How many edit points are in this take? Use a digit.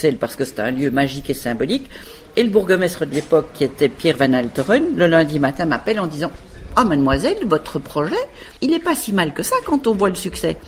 1